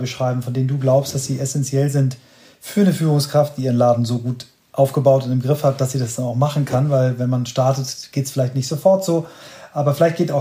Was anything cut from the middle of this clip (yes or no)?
no